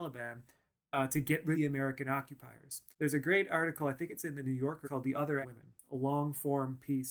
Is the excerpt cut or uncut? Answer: cut